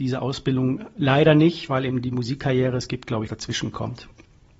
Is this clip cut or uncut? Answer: cut